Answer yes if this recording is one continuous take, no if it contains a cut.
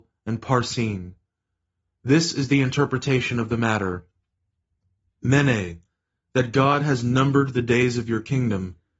yes